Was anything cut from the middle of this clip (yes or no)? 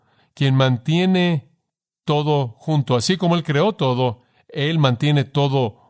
no